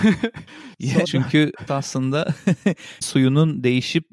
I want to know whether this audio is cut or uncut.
cut